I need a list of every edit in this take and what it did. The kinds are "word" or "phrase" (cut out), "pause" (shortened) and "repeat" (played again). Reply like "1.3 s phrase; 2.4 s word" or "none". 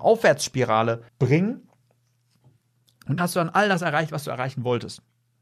1.1 s pause; 3.2 s word